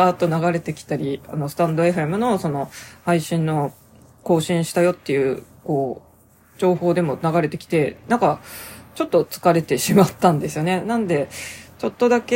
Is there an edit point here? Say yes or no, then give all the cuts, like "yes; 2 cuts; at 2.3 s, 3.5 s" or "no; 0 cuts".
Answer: no; 0 cuts